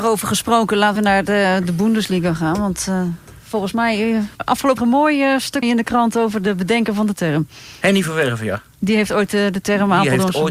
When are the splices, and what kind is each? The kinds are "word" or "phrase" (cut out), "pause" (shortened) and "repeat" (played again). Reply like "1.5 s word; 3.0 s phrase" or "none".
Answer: 1.0 s word; 4.3 s word; 4.8 s word; 5.6 s word